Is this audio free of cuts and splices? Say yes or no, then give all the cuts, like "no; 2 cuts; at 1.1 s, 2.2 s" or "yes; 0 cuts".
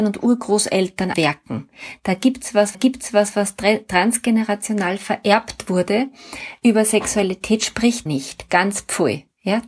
no; 3 cuts; at 1.1 s, 2.7 s, 8.1 s